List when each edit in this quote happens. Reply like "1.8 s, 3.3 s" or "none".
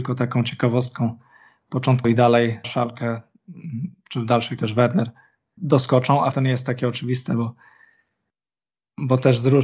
2.0 s, 2.6 s, 4.6 s, 5.6 s, 6.3 s